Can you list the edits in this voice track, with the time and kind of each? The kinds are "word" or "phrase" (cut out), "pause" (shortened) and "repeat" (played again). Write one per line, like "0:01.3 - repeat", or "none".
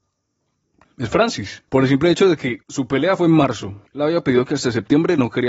0:01.7 - pause
0:02.6 - pause
0:03.9 - pause